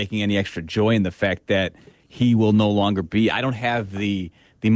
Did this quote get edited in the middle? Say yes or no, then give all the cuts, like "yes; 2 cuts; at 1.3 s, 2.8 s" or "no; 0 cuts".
no; 0 cuts